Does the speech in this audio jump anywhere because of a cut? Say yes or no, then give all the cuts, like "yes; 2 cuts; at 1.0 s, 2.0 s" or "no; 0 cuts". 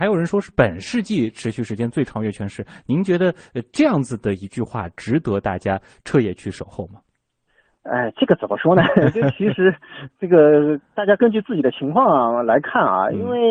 no; 0 cuts